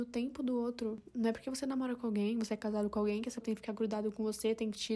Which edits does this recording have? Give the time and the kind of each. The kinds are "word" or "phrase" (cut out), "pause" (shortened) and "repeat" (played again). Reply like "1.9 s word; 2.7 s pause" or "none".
3.4 s word

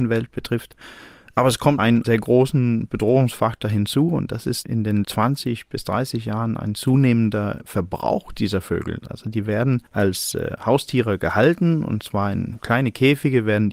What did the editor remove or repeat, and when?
1.8 s word; 5.0 s word; 9.9 s pause

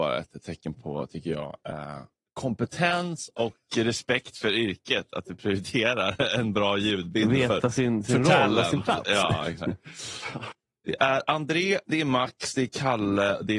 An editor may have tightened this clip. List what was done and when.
none

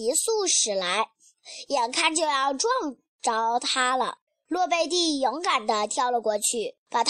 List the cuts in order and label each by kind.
4.3 s pause

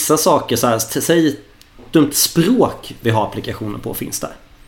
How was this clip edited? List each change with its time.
2.1 s phrase

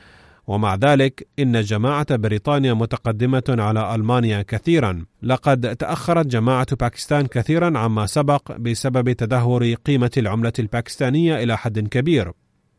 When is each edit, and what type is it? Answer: 5.1 s pause

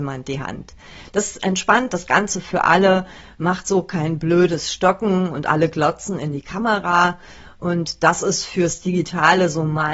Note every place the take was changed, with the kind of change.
none

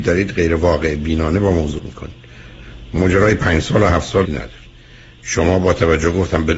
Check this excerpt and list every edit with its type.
1.8 s word; 4.2 s phrase

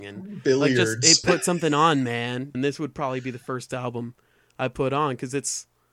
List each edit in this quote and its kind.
2.5 s word

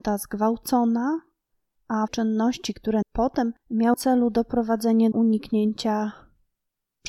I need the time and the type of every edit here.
2.1 s word; 3.0 s word; 3.9 s word; 5.1 s word

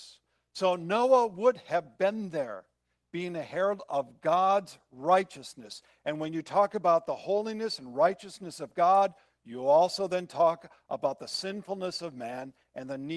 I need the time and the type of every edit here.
none

